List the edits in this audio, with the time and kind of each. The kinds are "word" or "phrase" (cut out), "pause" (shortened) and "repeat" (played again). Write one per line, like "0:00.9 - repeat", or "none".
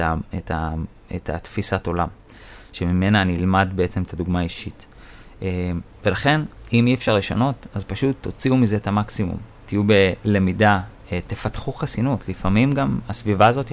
none